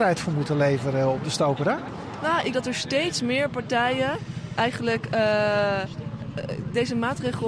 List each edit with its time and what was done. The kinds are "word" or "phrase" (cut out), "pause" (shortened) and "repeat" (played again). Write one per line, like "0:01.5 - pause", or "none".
0:02.5 - word

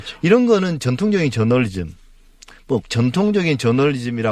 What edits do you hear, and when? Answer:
0:02.8 - word

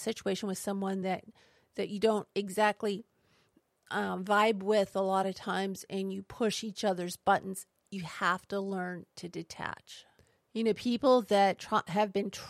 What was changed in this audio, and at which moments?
none

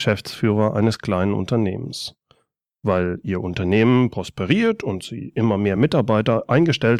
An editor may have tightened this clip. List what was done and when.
none

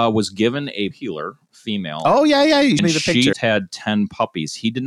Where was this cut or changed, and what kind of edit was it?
0:00.9 - word
0:02.8 - word
0:03.3 - word

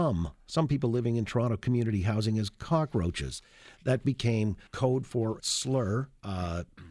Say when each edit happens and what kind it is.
0:04.7 - pause
0:05.4 - phrase

